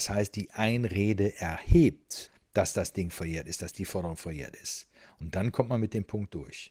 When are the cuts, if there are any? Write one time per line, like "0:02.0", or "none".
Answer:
none